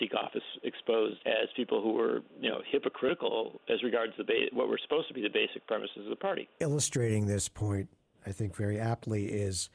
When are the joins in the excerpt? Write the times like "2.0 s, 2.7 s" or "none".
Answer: 1.2 s, 6.5 s